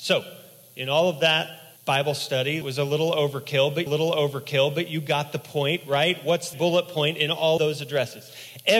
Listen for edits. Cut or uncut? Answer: cut